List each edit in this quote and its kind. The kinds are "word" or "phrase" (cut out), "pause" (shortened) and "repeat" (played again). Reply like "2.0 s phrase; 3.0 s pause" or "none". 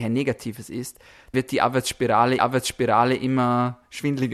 1.3 s word; 2.4 s repeat